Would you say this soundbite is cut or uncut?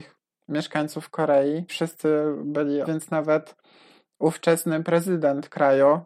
cut